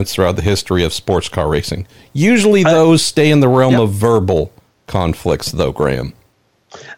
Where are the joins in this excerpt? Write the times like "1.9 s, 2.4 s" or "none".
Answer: none